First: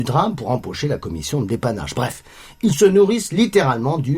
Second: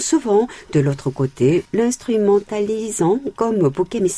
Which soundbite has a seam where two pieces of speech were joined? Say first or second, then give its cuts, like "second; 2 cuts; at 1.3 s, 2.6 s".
second; 1 cut; at 1.6 s